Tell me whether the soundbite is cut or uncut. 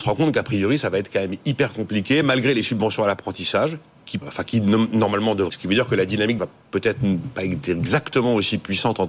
cut